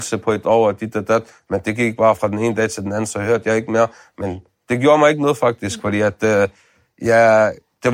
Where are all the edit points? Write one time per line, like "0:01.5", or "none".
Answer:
none

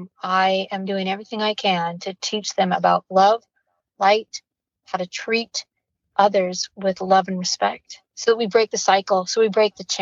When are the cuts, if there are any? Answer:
none

